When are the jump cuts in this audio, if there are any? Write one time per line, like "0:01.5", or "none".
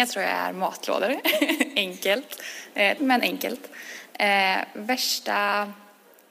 0:03.0